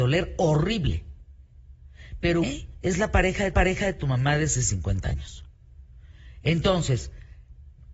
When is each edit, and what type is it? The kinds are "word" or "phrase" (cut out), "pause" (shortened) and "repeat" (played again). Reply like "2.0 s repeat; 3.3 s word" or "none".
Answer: 2.4 s word; 3.5 s repeat; 4.6 s word